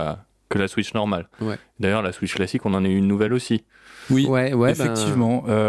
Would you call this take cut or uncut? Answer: uncut